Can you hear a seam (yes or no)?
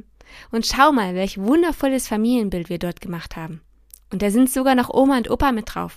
no